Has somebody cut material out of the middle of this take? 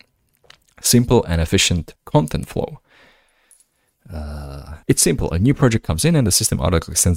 yes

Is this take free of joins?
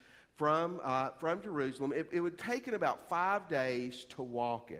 yes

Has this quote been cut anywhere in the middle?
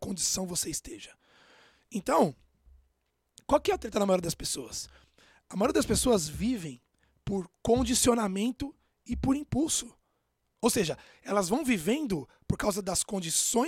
no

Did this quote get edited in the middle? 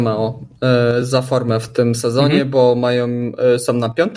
no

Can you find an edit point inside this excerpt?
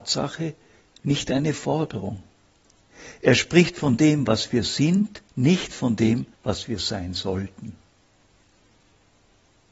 yes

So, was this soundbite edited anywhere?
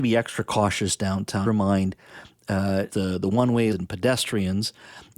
yes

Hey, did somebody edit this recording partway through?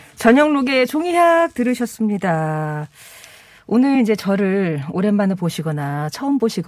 no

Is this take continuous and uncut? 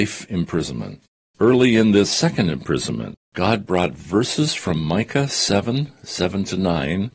no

